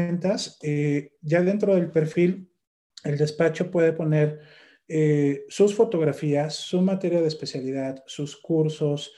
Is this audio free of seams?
yes; 0 cuts

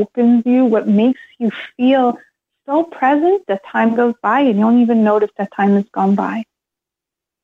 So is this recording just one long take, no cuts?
yes; 0 cuts

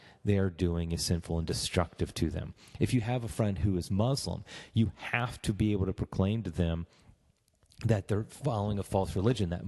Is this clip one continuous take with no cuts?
yes; 0 cuts

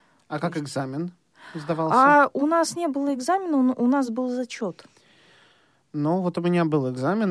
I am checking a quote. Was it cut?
no; 0 cuts

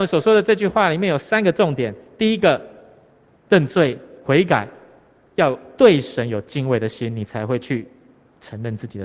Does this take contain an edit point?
no; 0 cuts

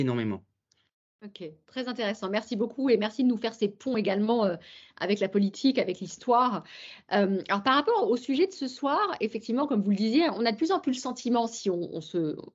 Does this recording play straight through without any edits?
yes; 0 cuts

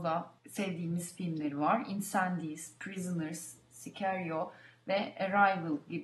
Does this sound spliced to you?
no; 0 cuts

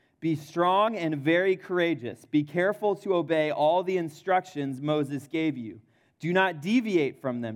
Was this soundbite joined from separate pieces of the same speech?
no; 0 cuts

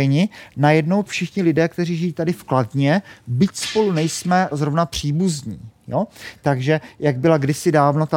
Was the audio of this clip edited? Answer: yes; 2 cuts; at 1.1 s, 4.5 s

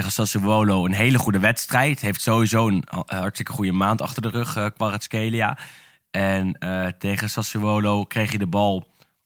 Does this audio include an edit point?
no; 0 cuts

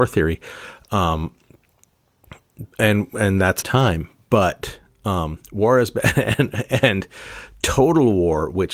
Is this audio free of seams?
no; 2 cuts; at 2.7 s, 3.6 s

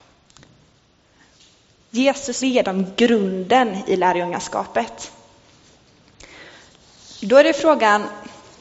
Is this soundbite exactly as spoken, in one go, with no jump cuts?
no; 1 cut; at 2.4 s

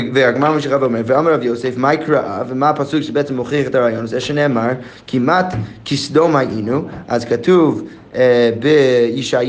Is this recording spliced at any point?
no; 0 cuts

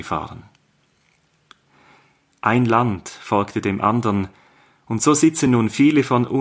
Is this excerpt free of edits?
yes; 0 cuts

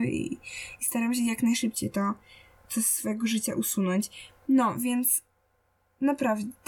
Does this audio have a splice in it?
no; 0 cuts

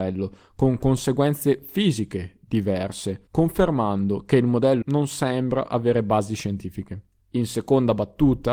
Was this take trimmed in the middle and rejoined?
yes; 3 cuts; at 3.3 s, 4.8 s, 7.2 s

